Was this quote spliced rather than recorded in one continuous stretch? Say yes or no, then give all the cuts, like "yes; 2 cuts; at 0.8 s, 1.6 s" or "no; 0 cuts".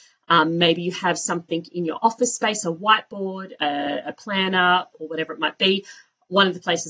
no; 0 cuts